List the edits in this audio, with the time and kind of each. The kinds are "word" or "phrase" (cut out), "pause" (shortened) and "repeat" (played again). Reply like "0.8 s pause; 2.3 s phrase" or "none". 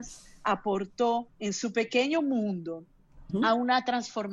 1.3 s pause; 3.3 s word